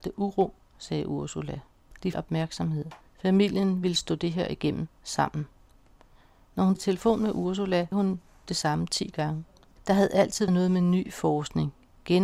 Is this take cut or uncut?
cut